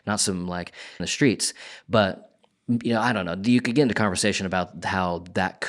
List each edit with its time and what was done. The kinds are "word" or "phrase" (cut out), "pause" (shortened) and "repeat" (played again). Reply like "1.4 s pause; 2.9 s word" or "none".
1.0 s phrase